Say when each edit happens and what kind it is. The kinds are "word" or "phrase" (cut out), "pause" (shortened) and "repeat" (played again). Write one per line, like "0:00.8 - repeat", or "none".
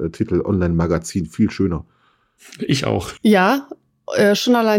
0:03.2 - pause